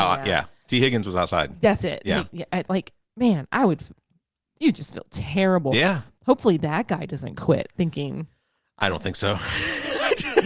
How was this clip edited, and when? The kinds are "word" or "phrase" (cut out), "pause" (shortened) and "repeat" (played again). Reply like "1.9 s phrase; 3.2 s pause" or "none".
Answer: none